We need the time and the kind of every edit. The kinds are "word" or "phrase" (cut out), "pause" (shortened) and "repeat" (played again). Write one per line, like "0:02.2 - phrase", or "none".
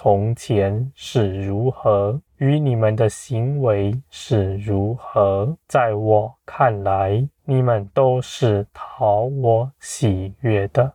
0:02.3 - pause
0:05.6 - pause
0:07.4 - pause